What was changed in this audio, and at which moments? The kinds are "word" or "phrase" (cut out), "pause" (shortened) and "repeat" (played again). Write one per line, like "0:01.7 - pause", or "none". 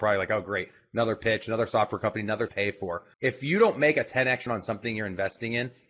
0:02.5 - phrase
0:03.1 - pause
0:04.5 - word